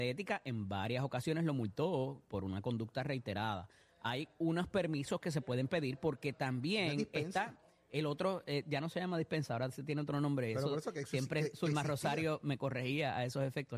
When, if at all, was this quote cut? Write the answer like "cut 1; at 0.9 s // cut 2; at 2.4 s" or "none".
cut 1; at 12.4 s

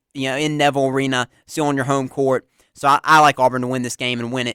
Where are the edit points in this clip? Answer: none

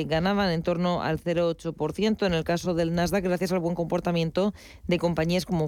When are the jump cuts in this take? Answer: none

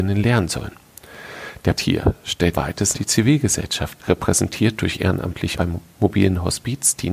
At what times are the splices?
cut 1; at 1.8 s // cut 2; at 2.5 s // cut 3; at 2.9 s // cut 4; at 4.0 s // cut 5; at 5.5 s

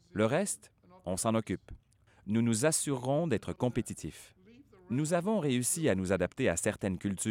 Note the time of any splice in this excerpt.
none

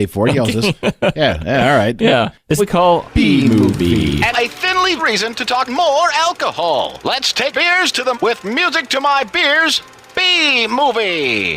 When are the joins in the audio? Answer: cut 1; at 2.6 s // cut 2; at 3.0 s // cut 3; at 4.3 s // cut 4; at 5.0 s // cut 5; at 5.6 s // cut 6; at 7.5 s // cut 7; at 8.1 s

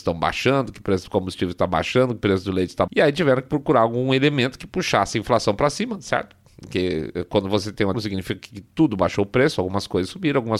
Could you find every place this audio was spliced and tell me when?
cut 1; at 2.9 s // cut 2; at 7.9 s

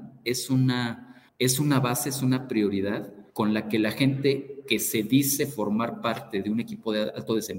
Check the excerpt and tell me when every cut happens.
cut 1; at 1.3 s // cut 2; at 3.3 s

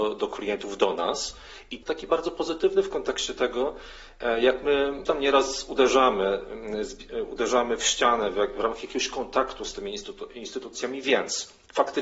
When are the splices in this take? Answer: cut 1; at 1.8 s // cut 2; at 5.1 s

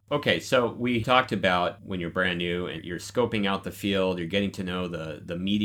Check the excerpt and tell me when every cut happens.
cut 1; at 1.0 s // cut 2; at 2.8 s

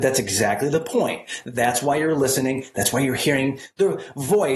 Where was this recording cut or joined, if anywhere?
none

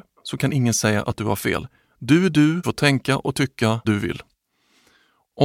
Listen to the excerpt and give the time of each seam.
cut 1; at 2.6 s // cut 2; at 3.8 s

